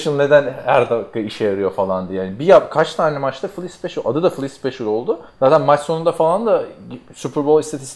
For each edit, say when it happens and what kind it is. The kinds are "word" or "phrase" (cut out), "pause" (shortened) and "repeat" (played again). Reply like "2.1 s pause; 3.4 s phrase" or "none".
5.3 s pause